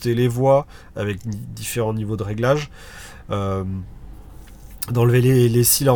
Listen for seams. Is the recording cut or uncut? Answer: uncut